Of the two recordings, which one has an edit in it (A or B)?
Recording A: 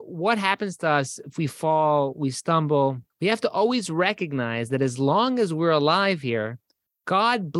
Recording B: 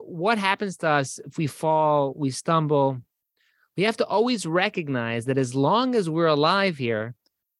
A